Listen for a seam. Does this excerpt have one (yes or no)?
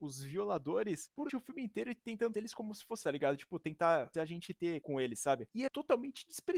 yes